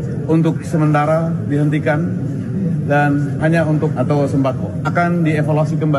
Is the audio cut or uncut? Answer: cut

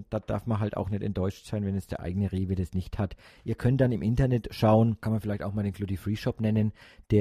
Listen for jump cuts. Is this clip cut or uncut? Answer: uncut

